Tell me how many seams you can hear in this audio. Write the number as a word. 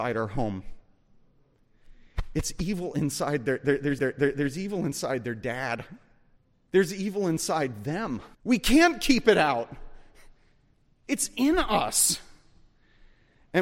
three